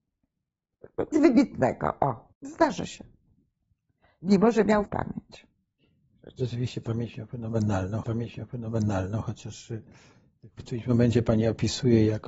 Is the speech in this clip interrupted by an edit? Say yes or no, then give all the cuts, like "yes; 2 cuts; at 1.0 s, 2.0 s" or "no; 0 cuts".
yes; 5 cuts; at 1.1 s, 2.3 s, 4.8 s, 8.0 s, 10.6 s